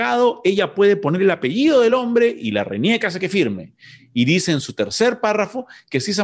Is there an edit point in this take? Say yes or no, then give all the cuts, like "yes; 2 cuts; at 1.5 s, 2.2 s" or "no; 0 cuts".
no; 0 cuts